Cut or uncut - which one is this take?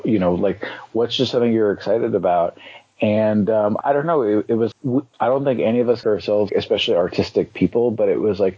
cut